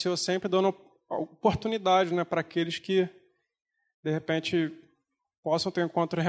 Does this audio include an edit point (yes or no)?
no